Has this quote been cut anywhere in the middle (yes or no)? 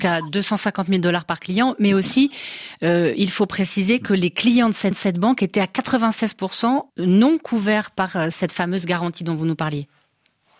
yes